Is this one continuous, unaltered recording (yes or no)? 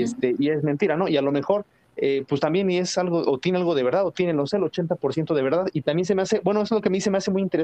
yes